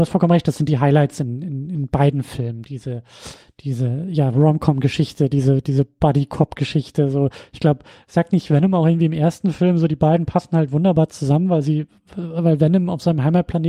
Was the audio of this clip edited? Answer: no; 0 cuts

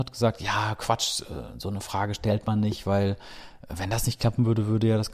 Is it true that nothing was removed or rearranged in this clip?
yes; 0 cuts

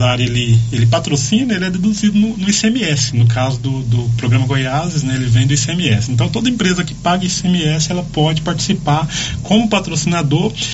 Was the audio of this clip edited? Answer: no; 0 cuts

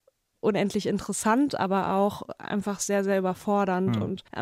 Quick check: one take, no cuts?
yes; 0 cuts

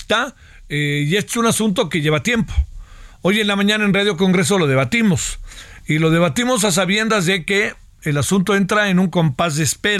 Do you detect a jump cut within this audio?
no; 0 cuts

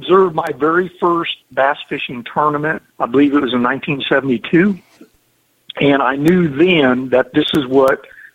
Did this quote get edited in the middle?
yes; 2 cuts; at 1.4 s, 2.9 s

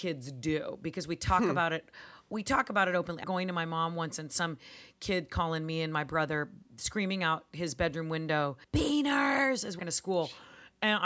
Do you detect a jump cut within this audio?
yes; 4 cuts; at 3.2 s, 6.7 s, 8.6 s, 9.8 s

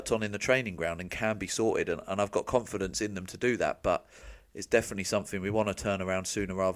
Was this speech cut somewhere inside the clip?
no; 0 cuts

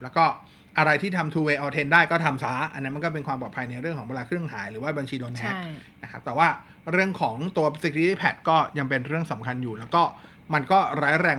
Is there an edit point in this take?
no; 0 cuts

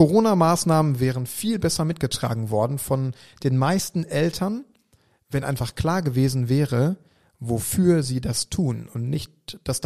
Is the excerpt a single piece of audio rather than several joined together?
yes; 0 cuts

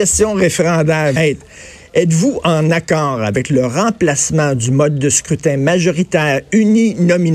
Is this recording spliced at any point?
yes; 1 cut; at 1.2 s

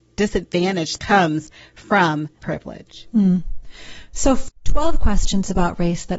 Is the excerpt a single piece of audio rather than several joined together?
no; 2 cuts; at 1.0 s, 2.4 s

